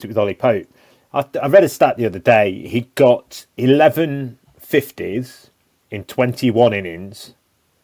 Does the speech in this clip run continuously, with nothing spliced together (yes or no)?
yes